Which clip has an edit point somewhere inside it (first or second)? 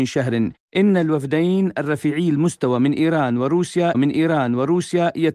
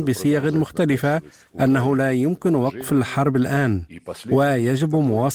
first